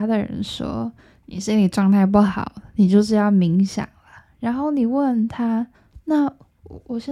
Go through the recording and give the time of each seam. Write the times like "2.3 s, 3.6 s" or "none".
1.0 s, 5.7 s